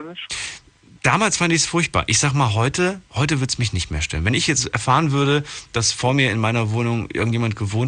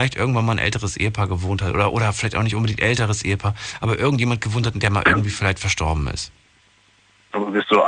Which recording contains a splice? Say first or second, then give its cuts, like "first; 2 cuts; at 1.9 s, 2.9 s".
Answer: first; 1 cut; at 3.0 s